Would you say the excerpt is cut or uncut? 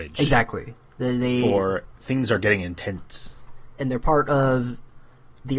cut